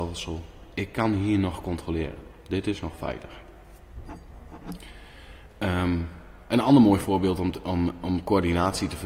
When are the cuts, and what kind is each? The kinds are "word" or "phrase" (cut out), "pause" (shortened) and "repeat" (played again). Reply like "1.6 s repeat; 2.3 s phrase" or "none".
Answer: none